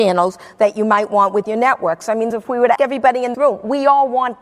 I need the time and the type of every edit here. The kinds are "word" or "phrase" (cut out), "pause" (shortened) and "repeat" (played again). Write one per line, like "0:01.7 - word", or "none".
0:02.3 - phrase
0:02.8 - word
0:03.3 - word

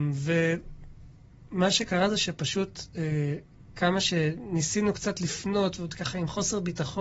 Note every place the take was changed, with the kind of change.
none

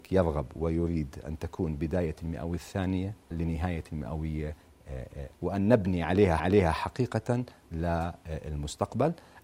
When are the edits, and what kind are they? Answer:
0:03.3 - word
0:05.3 - word
0:06.4 - repeat

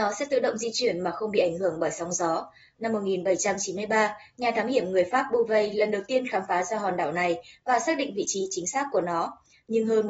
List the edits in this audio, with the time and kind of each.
none

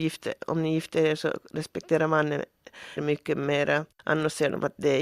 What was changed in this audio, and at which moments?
0:03.0 - word
0:03.9 - pause

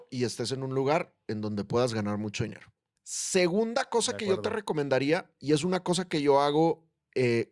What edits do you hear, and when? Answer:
0:03.0 - pause

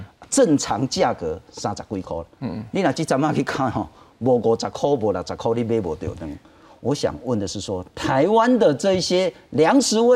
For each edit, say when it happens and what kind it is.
none

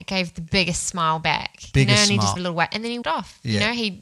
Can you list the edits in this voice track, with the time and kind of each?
0:02.4 - word
0:03.0 - word

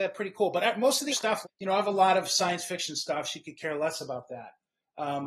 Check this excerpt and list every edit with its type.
0:01.1 - word
0:01.4 - word

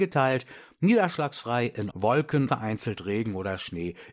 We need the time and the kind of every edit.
0:01.9 - word
0:02.5 - word

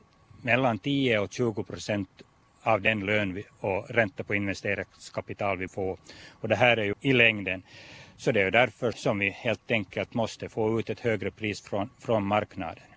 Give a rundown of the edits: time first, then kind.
0:03.5 - pause
0:05.7 - word
0:06.9 - phrase
0:08.9 - word

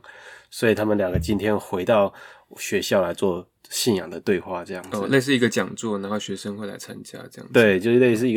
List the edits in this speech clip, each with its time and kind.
none

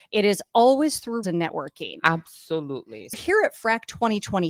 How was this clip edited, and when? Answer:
0:01.2 - word
0:03.1 - word

